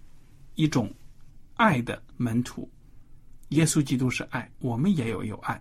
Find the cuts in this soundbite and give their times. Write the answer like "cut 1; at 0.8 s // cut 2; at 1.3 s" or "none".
cut 1; at 2.1 s